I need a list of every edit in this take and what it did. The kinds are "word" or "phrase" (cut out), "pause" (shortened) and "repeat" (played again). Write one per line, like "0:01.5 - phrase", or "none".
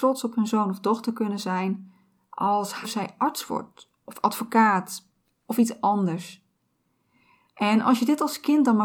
0:02.8 - word